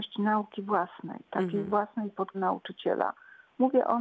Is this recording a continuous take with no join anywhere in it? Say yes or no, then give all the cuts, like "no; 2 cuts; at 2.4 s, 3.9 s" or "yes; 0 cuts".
no; 1 cut; at 2.3 s